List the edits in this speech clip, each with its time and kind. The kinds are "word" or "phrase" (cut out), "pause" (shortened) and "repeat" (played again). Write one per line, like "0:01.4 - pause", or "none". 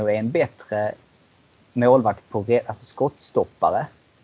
none